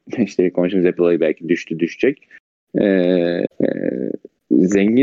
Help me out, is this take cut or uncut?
cut